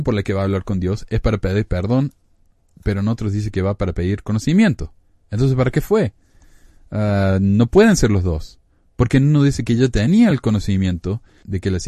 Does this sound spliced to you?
no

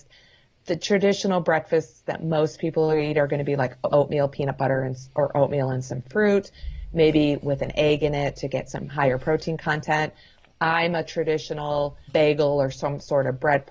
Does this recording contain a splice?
yes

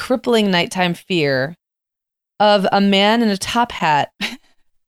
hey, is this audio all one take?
yes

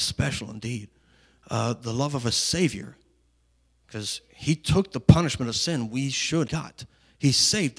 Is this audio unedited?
no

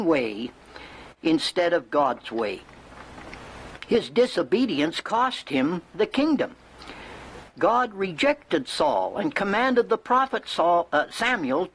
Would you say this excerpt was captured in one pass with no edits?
yes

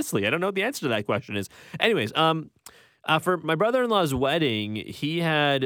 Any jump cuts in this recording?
yes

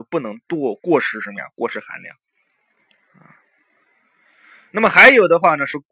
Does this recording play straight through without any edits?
yes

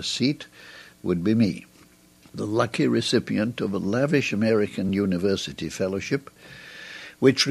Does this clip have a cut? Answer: no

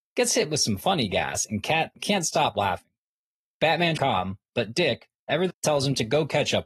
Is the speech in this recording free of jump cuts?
no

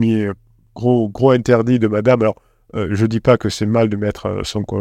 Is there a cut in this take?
no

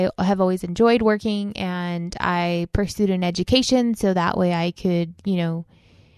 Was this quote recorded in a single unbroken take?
yes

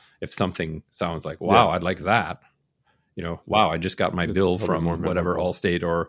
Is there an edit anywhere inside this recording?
no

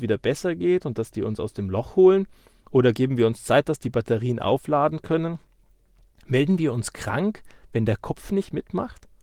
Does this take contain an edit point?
no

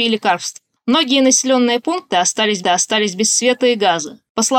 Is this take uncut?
no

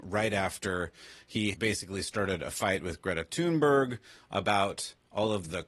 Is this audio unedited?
no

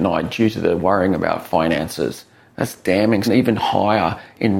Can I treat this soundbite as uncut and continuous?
no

